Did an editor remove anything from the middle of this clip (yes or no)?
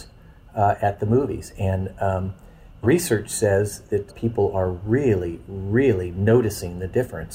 yes